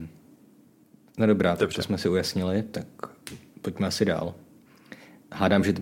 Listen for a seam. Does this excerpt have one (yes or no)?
no